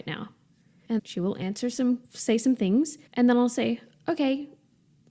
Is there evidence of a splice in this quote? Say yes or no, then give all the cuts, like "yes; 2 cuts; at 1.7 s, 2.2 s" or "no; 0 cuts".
yes; 3 cuts; at 1.0 s, 2.0 s, 3.1 s